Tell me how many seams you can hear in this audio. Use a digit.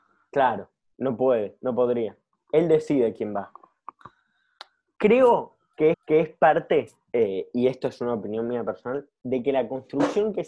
1